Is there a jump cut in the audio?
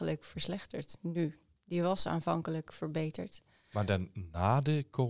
no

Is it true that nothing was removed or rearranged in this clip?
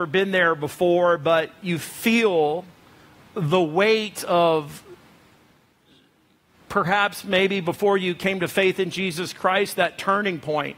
yes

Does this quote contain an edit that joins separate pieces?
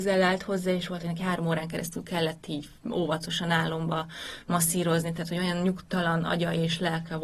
no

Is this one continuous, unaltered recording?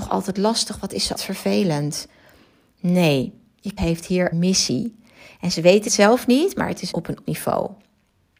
no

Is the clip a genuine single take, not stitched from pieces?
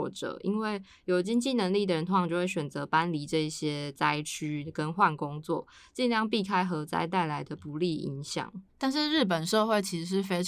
yes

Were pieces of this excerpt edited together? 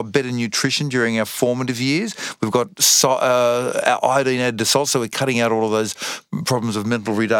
no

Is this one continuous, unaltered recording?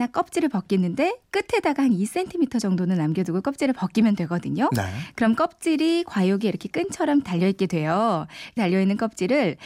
no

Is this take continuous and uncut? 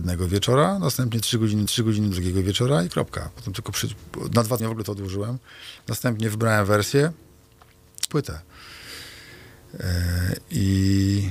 no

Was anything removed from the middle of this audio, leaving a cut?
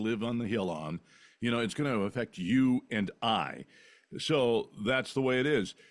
no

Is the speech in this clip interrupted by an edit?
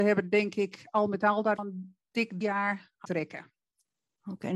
yes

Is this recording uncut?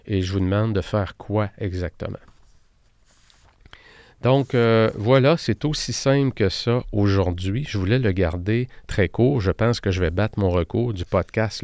yes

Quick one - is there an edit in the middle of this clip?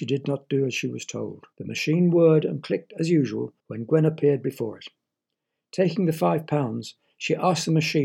yes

